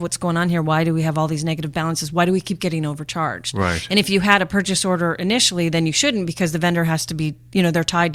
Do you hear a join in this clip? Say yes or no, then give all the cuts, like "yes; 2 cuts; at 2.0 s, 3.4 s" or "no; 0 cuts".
no; 0 cuts